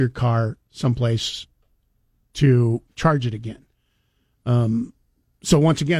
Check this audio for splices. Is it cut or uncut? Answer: uncut